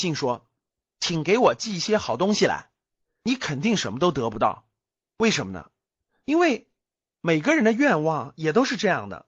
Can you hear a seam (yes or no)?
no